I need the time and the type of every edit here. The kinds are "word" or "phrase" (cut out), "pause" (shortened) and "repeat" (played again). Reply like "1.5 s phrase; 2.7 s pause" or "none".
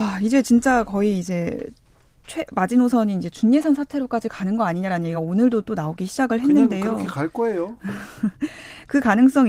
none